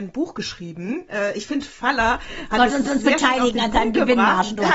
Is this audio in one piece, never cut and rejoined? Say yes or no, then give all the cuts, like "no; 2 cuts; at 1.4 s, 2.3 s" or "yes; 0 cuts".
no; 1 cut; at 2.9 s